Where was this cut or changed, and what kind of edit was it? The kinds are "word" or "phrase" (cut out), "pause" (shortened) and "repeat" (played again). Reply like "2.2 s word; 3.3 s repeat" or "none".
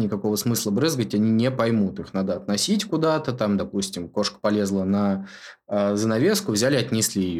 none